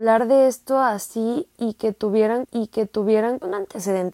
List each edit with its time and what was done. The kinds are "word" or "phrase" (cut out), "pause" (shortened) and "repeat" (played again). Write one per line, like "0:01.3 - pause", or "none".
0:02.4 - repeat